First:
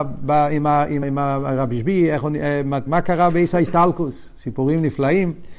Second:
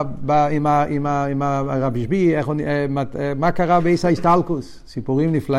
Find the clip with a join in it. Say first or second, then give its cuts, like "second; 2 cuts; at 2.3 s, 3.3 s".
first; 2 cuts; at 1.0 s, 2.9 s